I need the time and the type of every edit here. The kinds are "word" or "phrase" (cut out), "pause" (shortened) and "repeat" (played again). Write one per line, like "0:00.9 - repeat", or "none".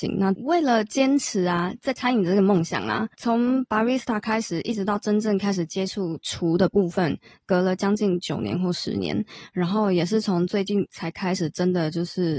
none